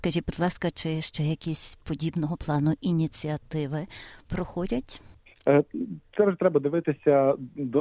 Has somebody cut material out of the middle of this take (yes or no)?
no